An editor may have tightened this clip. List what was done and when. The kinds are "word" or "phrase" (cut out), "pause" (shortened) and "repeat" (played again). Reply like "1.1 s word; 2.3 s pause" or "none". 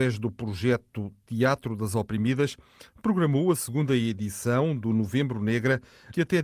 none